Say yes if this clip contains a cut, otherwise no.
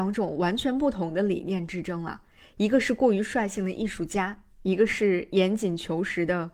no